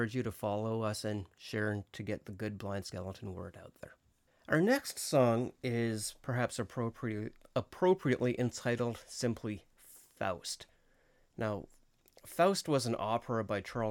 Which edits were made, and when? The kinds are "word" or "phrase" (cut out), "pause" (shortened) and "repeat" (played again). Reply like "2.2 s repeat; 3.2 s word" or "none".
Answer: 4.3 s pause